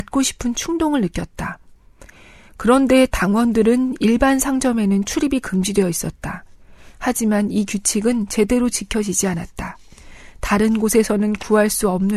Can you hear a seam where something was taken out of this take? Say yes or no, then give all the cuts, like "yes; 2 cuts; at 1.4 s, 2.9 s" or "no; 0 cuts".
no; 0 cuts